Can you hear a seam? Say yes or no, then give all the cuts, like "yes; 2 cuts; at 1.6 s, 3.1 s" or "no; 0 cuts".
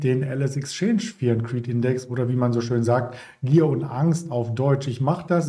no; 0 cuts